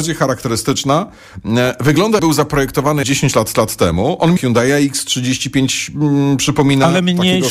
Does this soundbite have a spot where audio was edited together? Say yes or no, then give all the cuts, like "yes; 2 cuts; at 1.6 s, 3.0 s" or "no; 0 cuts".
yes; 4 cuts; at 2.2 s, 3.0 s, 3.5 s, 4.4 s